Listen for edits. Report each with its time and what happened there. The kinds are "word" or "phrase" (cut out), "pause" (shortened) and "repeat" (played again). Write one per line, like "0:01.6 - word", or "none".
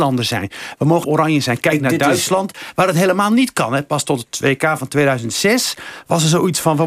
0:01.0 - word